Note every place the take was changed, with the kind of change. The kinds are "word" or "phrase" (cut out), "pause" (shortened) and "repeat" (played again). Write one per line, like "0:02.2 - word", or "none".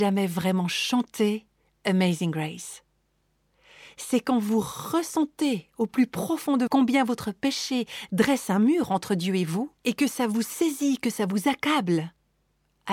0:06.7 - word
0:09.8 - pause